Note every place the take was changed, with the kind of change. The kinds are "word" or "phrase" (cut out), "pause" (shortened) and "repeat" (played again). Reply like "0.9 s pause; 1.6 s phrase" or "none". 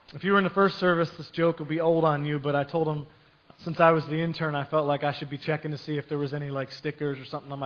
3.5 s word